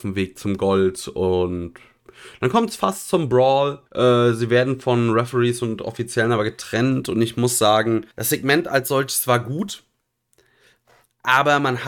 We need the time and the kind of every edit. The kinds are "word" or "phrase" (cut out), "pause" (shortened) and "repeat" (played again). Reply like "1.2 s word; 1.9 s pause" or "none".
3.9 s pause; 8.1 s pause